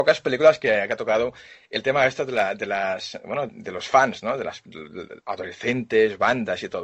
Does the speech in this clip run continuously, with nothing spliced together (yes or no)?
no